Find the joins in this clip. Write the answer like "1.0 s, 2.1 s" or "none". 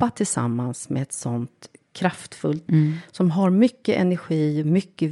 2.7 s

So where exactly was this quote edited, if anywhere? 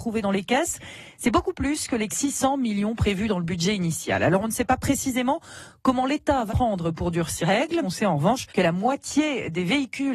2.1 s, 6.5 s, 7.4 s, 7.8 s, 8.5 s

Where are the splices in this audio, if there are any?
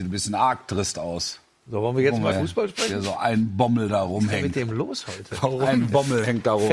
2.3 s

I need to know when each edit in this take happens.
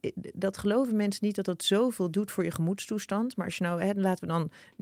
none

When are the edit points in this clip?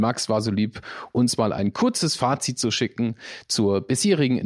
none

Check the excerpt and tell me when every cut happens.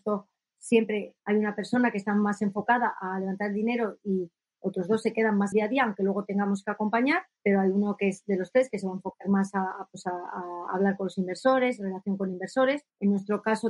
5.5 s, 7.4 s

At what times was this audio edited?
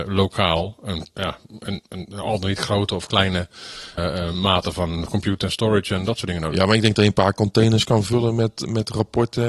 1.1 s, 4.0 s

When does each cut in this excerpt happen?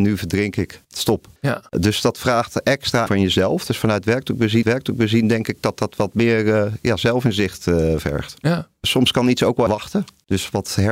1.4 s, 3.1 s, 4.6 s, 9.7 s

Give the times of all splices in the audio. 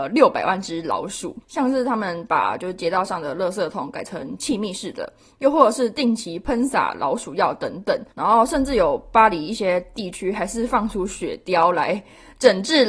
1.4 s, 8.1 s

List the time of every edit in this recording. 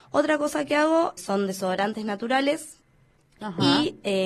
1.2 s

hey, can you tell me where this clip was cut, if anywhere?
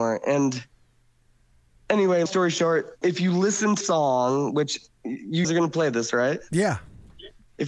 2.3 s, 3.0 s, 3.8 s, 5.4 s

